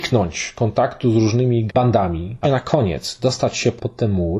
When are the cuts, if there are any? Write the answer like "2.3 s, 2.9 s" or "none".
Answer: 1.7 s, 2.4 s